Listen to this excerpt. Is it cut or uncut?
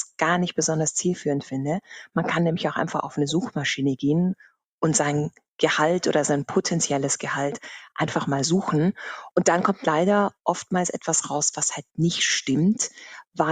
uncut